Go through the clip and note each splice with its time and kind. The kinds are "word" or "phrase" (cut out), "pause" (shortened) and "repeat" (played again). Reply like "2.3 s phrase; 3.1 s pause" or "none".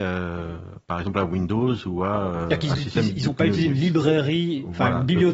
none